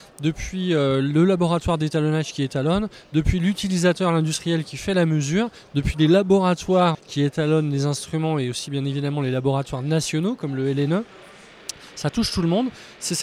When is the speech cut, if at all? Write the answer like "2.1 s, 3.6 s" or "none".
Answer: 6.9 s